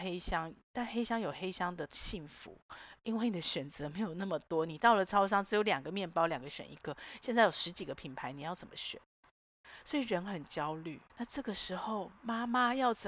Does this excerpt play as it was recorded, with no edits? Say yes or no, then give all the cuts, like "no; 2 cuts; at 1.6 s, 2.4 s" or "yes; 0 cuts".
no; 1 cut; at 11.1 s